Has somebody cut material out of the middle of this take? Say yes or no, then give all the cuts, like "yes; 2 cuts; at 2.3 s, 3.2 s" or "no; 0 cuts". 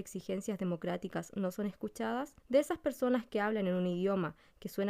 yes; 1 cut; at 2.4 s